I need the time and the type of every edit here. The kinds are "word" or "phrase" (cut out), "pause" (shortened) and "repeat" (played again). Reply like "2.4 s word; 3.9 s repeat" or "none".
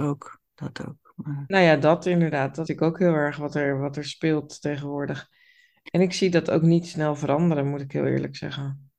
2.7 s word

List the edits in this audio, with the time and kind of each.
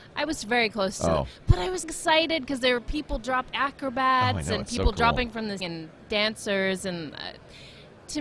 1.8 s word; 5.6 s word

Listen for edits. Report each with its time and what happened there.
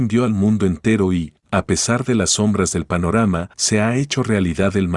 3.5 s pause

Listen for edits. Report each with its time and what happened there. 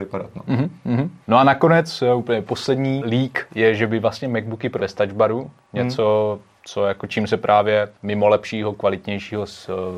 1.2 s pause; 3.0 s word; 4.8 s phrase; 8.0 s pause

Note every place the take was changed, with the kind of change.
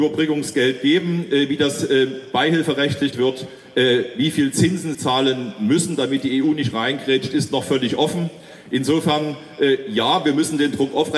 3.1 s word; 4.9 s word

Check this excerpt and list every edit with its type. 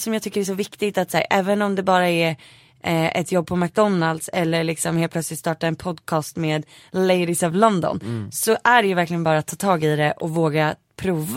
none

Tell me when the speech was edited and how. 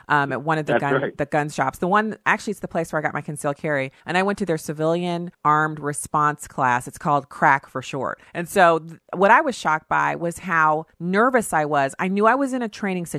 4.0 s pause; 5.3 s pause; 8.3 s pause; 10.9 s pause

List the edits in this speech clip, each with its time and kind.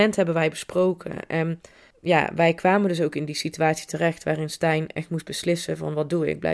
none

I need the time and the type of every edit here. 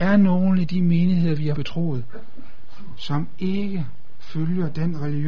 1.6 s word

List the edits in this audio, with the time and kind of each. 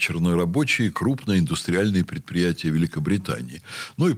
none

